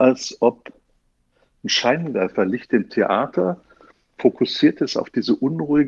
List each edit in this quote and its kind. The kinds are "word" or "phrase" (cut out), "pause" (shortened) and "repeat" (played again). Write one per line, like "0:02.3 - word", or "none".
none